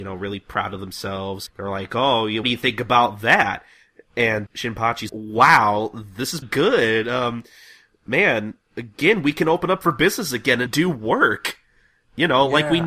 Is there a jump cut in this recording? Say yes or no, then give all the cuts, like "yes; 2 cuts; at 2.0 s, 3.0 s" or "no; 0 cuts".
yes; 6 cuts; at 1.5 s, 2.4 s, 4.5 s, 5.1 s, 6.4 s, 10.7 s